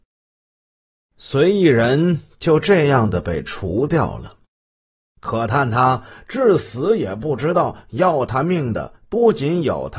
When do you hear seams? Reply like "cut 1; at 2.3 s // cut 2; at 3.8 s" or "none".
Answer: cut 1; at 9.0 s